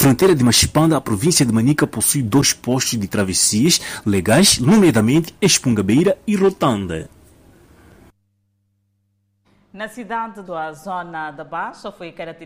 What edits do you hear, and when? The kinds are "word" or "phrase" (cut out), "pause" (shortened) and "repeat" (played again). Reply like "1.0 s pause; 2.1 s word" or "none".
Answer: 10.5 s word